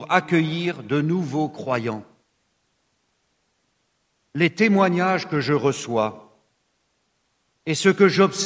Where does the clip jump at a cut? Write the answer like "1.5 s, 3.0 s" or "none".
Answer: none